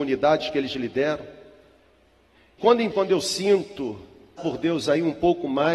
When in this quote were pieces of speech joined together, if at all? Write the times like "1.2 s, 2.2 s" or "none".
2.6 s, 2.9 s, 4.4 s